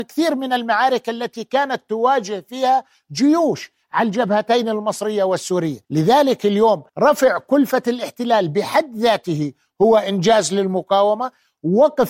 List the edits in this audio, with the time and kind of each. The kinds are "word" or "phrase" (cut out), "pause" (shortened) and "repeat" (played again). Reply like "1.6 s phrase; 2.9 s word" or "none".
5.8 s pause; 6.9 s pause